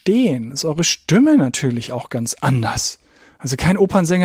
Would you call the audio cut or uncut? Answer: uncut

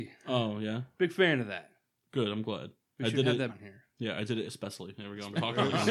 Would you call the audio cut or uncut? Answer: cut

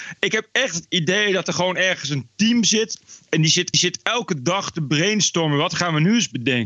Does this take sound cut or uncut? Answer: cut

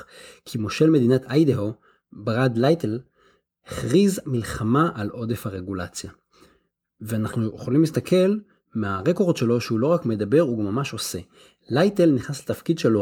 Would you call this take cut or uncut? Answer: uncut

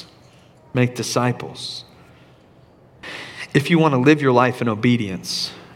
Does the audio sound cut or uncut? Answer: uncut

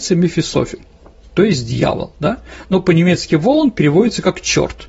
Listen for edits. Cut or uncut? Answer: uncut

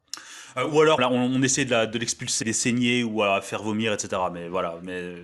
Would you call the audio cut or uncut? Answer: cut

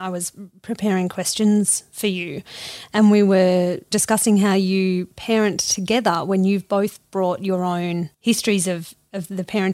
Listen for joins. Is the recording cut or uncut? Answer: cut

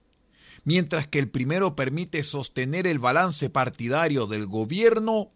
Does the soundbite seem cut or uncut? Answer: uncut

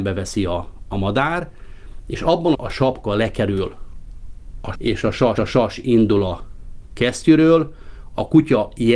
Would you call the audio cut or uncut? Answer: cut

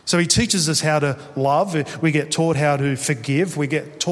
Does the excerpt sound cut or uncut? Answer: uncut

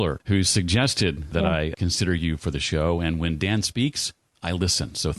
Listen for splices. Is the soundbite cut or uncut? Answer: uncut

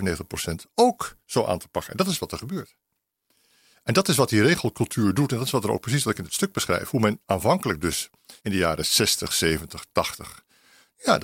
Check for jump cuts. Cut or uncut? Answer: cut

